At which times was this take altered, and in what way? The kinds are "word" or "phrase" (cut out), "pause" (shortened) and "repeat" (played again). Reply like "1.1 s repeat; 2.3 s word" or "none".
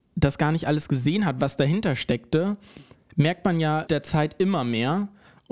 3.9 s word

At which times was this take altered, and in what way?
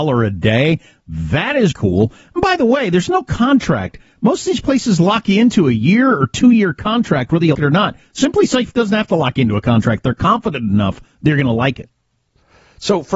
1.7 s word; 7.5 s word

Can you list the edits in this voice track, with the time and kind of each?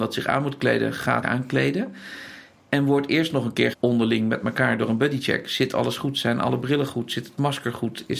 1.2 s word; 3.7 s word

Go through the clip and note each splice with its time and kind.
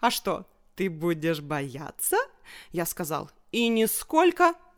none

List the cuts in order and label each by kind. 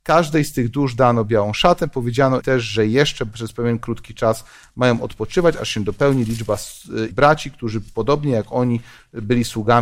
2.4 s word; 7.1 s word

